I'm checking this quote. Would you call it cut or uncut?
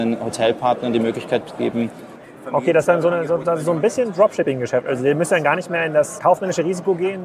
cut